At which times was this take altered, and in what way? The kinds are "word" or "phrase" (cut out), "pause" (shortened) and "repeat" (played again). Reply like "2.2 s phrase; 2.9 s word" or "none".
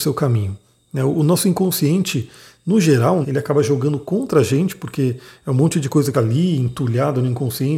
3.2 s word; 6.1 s word

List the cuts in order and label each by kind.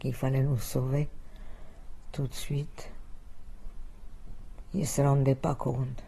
none

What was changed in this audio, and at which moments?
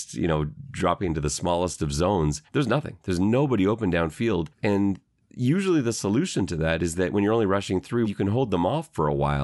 2.5 s pause; 4.5 s pause; 8.0 s word

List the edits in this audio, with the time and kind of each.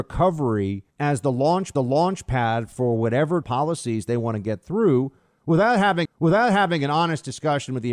0.9 s pause; 1.8 s repeat; 3.4 s word; 6.1 s repeat

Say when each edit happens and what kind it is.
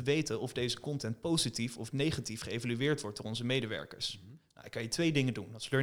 none

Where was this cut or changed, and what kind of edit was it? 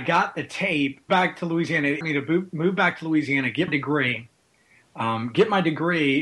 1.1 s word; 2.0 s word; 3.7 s word

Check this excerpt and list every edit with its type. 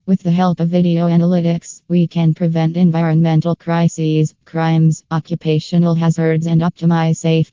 none

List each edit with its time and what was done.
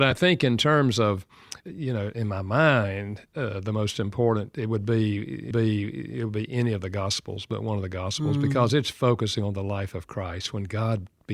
1.6 s word; 3.3 s pause; 5.5 s repeat

